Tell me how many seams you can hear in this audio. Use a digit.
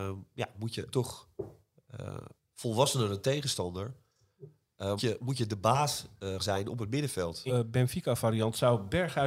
5